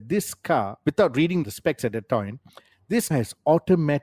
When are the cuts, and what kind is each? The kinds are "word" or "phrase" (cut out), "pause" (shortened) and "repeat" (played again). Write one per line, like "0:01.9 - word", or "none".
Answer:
0:01.4 - word
0:03.1 - word